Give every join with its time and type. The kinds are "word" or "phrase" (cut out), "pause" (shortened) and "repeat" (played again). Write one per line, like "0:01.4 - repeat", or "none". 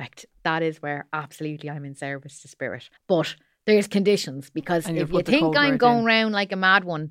0:03.0 - pause